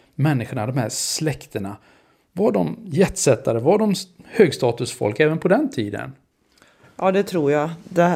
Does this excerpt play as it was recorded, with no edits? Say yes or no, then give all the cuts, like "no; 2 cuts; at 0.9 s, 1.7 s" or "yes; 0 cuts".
yes; 0 cuts